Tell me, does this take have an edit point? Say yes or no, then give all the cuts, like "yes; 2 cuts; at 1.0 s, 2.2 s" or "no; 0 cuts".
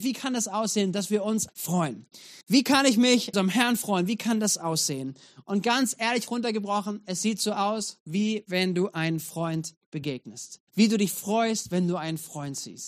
yes; 4 cuts; at 1.5 s, 2.4 s, 3.3 s, 10.7 s